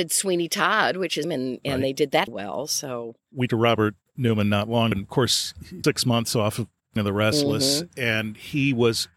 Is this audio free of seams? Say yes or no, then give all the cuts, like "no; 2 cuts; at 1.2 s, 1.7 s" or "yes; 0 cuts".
no; 6 cuts; at 1.2 s, 2.3 s, 3.5 s, 4.9 s, 5.8 s, 7.0 s